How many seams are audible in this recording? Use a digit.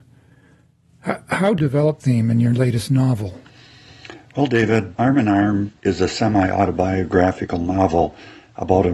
4